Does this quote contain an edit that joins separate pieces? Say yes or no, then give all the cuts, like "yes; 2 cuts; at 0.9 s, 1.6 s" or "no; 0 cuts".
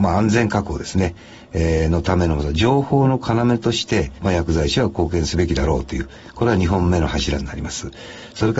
no; 0 cuts